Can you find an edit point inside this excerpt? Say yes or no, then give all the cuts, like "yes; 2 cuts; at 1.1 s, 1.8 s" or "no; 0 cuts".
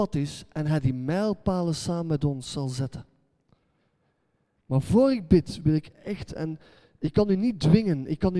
no; 0 cuts